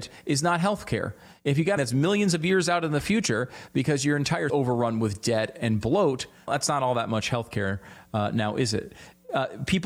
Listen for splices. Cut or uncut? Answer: cut